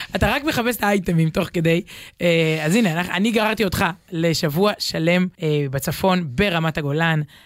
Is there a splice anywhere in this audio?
yes; 1 cut; at 5.3 s

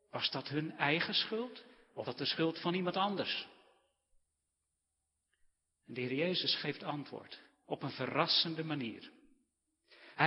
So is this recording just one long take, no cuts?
no; 1 cut; at 2.1 s

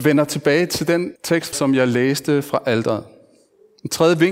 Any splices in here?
yes; 2 cuts; at 1.2 s, 1.5 s

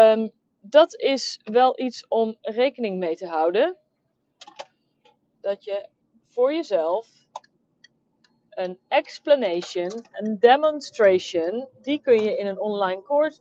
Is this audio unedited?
yes; 0 cuts

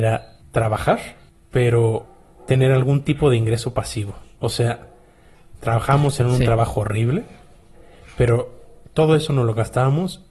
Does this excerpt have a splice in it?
no; 0 cuts

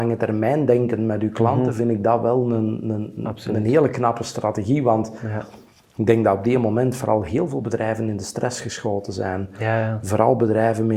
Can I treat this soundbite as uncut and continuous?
yes; 0 cuts

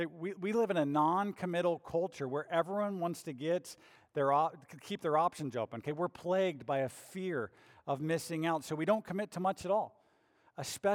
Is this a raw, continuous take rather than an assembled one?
yes; 0 cuts

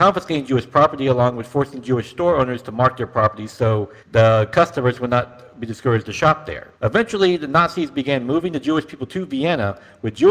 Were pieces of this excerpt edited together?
yes; 2 cuts; at 4.0 s, 6.7 s

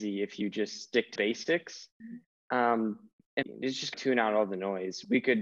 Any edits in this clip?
yes; 3 cuts; at 1.2 s, 3.4 s, 3.9 s

